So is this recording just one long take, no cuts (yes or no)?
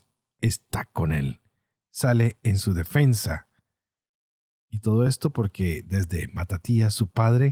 yes